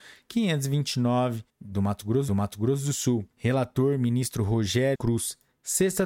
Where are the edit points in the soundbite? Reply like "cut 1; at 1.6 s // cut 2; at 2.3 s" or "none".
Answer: cut 1; at 1.5 s // cut 2; at 2.3 s // cut 3; at 3.3 s // cut 4; at 5.0 s